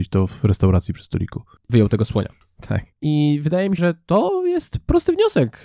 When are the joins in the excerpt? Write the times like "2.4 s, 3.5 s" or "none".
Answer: 1.7 s, 2.9 s, 3.8 s